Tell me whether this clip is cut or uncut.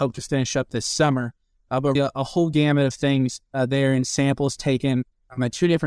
cut